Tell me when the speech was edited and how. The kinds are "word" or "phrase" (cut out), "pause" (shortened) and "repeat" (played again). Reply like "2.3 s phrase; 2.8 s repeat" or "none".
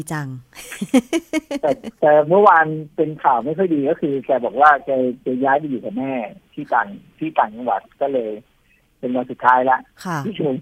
none